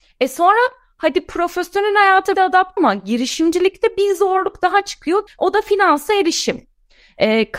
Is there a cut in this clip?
yes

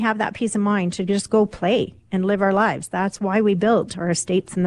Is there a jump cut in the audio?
no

